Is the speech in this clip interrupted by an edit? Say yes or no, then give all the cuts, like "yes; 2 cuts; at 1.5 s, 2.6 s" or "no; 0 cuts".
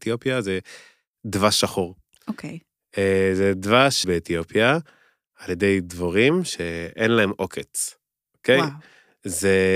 yes; 1 cut; at 4.0 s